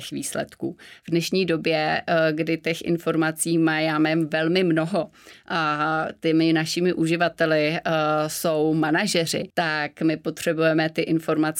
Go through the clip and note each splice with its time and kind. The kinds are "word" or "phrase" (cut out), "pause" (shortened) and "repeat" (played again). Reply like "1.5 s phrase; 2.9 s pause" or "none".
9.5 s pause